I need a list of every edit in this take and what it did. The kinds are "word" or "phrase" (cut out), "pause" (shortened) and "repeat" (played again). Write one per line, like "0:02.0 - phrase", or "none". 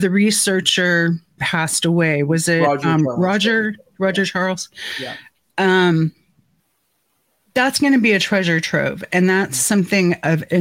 0:01.4 - word